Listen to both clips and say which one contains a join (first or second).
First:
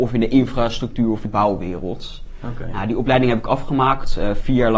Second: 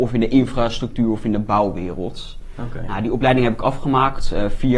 first